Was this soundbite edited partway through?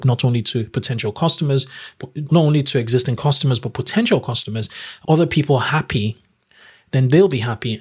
yes; 2 cuts; at 2.3 s, 5.0 s

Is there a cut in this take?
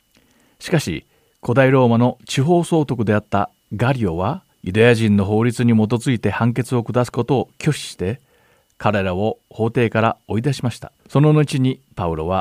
yes; 2 cuts; at 4.5 s, 11.0 s

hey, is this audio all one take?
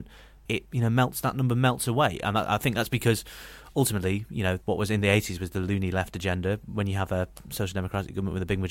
yes; 0 cuts

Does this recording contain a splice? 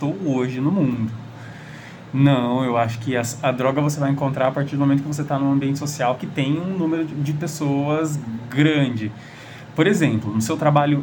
no; 0 cuts

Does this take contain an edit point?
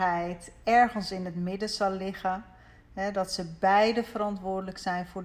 no; 0 cuts

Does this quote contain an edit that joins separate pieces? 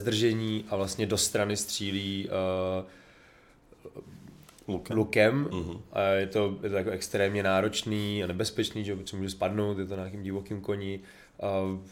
no; 0 cuts

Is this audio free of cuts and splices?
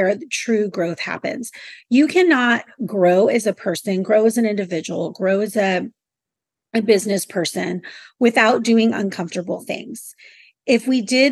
yes; 0 cuts

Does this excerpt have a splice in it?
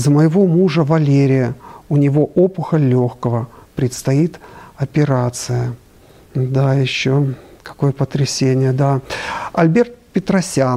no; 0 cuts

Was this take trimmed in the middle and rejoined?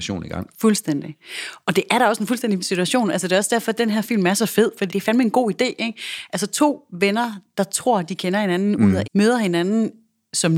yes; 3 cuts; at 2.6 s, 4.9 s, 9.0 s

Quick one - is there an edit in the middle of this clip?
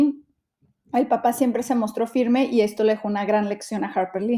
no; 0 cuts

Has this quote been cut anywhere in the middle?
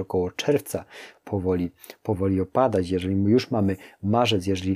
no; 0 cuts

